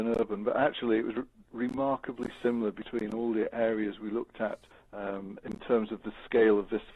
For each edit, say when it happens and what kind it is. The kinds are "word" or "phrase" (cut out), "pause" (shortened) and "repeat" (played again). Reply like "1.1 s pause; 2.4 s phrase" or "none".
4.7 s pause

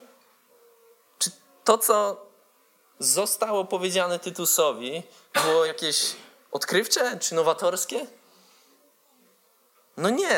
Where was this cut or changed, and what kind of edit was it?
none

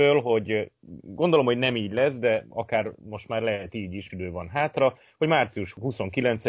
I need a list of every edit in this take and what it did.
4.1 s phrase

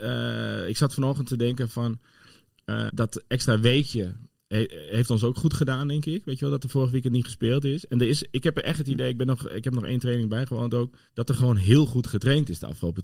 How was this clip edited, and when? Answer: 2.9 s word; 11.1 s pause

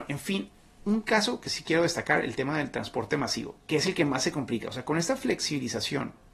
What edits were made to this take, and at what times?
3.6 s pause

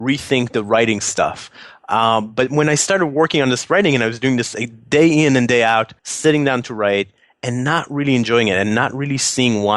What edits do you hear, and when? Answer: 6.0 s pause

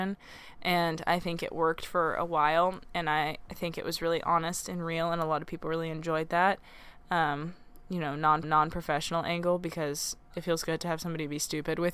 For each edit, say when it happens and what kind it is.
8.4 s repeat; 10.3 s word

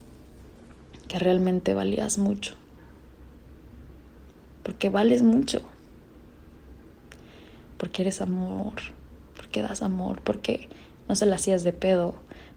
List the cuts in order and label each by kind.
none

